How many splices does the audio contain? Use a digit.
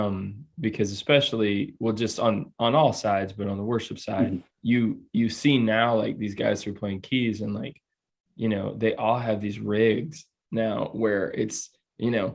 1